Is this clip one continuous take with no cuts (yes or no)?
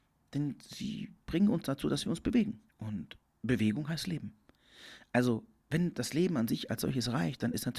no